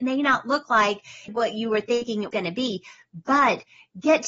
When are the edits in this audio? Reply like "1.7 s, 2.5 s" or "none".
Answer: 1.3 s, 2.3 s